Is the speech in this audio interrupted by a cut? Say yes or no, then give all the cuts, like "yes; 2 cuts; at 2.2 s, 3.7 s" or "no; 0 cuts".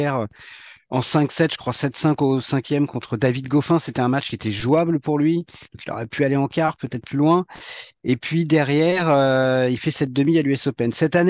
no; 0 cuts